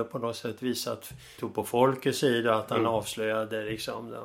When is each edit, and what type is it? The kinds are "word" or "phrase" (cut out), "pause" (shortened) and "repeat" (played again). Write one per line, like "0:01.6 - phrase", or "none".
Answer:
0:01.4 - word